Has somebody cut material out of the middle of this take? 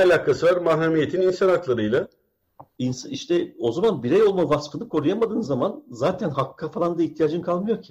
no; 0 cuts

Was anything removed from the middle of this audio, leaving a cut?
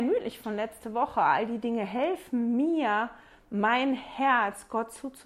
no; 0 cuts

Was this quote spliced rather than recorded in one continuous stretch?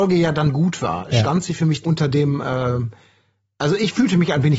yes; 1 cut; at 1.8 s

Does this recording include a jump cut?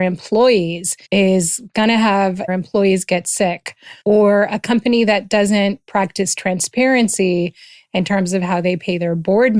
yes; 3 cuts; at 1.0 s, 2.5 s, 4.0 s

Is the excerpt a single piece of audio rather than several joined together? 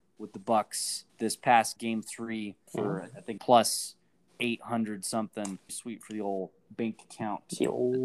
no; 5 cuts; at 1.1 s, 1.8 s, 2.7 s, 3.4 s, 5.7 s

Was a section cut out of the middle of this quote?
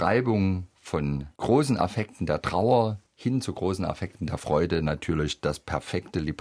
yes; 1 cut; at 3.1 s

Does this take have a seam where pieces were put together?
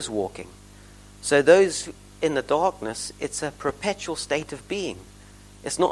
no; 0 cuts

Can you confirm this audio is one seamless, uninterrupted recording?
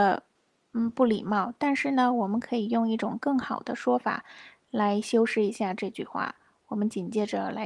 yes; 0 cuts

